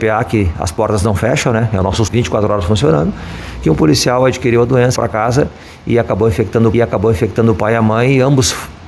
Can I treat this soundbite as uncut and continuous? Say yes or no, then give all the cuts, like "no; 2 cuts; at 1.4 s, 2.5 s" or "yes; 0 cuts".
no; 3 cuts; at 2.1 s, 5.0 s, 6.7 s